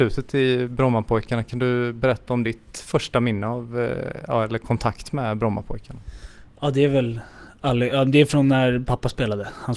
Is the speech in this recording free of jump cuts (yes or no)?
yes